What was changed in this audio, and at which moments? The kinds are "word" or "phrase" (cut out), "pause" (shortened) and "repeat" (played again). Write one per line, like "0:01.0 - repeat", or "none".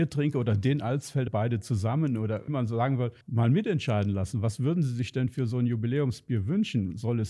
0:01.3 - phrase
0:02.5 - word
0:03.2 - pause